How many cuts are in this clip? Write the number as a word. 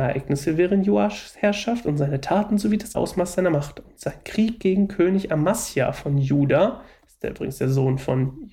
one